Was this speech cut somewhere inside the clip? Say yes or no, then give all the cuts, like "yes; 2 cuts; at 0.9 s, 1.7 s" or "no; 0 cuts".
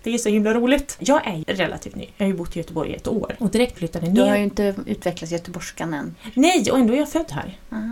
yes; 2 cuts; at 1.4 s, 3.8 s